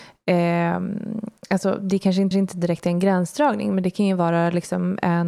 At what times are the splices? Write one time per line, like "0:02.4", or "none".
0:02.3